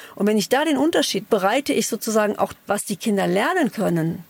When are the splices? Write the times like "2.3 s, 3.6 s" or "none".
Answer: 1.2 s, 2.5 s